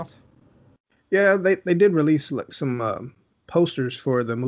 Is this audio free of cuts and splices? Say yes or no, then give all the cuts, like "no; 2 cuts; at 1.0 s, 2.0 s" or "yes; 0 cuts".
yes; 0 cuts